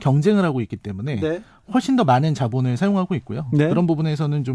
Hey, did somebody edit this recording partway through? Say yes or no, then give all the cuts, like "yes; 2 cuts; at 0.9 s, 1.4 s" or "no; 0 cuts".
no; 0 cuts